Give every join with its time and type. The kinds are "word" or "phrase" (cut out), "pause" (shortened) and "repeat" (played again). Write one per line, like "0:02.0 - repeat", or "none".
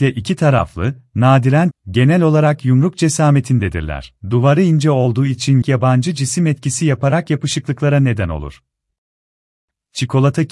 0:01.7 - phrase
0:04.2 - pause
0:05.6 - phrase